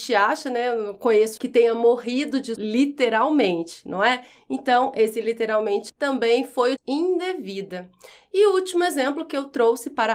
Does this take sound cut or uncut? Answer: cut